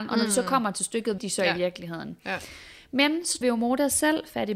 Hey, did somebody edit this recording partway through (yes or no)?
yes